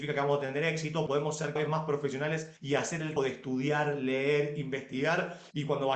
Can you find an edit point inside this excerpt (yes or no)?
yes